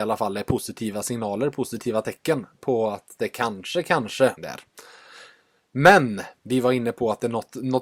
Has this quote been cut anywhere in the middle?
yes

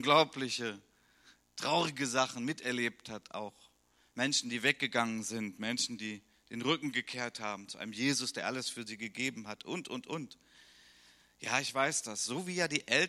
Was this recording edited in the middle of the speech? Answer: no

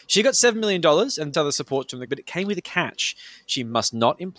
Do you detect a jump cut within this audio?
yes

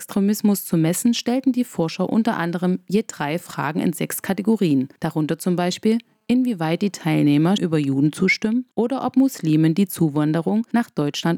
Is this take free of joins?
no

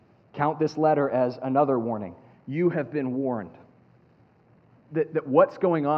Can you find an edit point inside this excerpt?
no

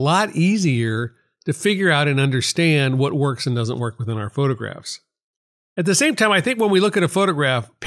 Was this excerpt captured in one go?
yes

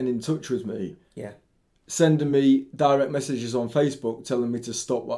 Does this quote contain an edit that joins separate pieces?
no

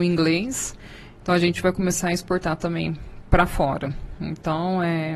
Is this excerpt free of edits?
yes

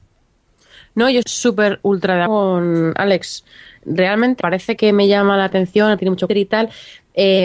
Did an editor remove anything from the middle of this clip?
yes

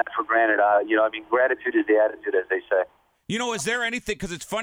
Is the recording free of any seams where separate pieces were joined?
yes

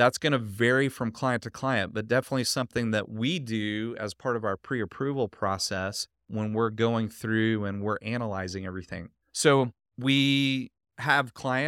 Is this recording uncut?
yes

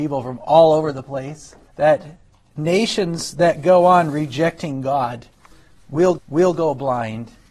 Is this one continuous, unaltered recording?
no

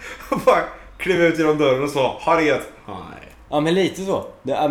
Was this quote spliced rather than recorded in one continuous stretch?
no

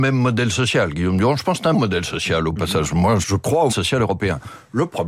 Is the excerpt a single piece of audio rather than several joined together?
no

